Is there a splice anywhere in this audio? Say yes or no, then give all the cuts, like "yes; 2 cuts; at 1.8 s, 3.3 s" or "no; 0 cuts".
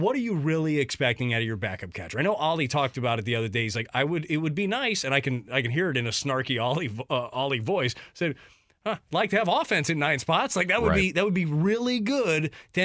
no; 0 cuts